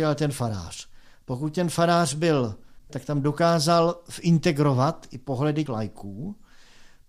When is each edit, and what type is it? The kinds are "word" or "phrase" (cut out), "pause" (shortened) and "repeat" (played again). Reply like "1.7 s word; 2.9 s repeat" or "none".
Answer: 2.9 s phrase; 5.7 s word